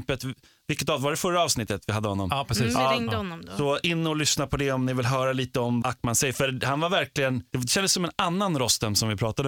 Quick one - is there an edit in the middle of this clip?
yes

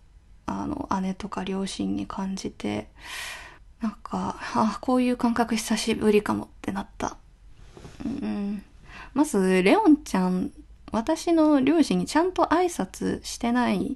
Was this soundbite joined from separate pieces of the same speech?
yes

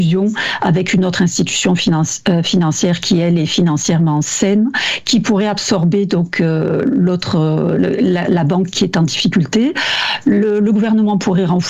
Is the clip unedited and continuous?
yes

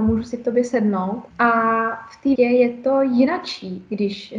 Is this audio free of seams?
no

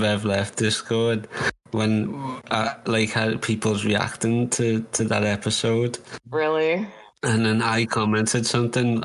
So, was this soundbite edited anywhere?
no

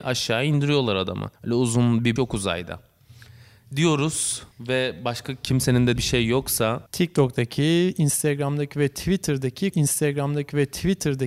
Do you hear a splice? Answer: yes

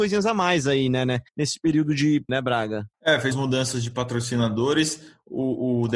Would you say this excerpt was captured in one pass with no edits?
no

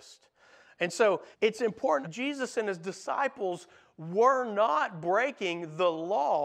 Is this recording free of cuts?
no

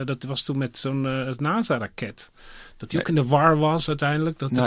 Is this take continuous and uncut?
yes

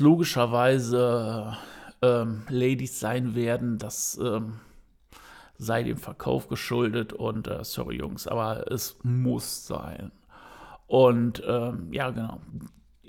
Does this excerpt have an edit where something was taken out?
no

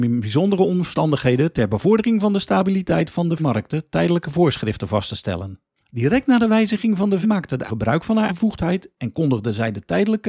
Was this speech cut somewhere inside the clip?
yes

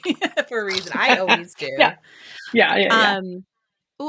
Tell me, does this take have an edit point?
no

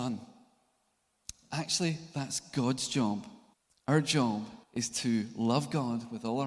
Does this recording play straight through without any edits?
no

